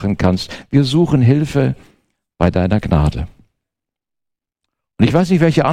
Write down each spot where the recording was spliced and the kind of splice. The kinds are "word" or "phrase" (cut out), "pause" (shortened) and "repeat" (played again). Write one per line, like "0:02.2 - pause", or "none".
none